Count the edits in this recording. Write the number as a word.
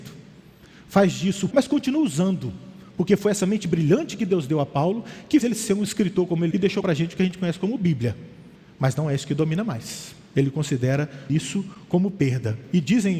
four